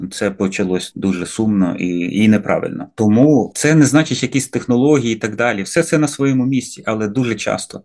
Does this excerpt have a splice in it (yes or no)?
yes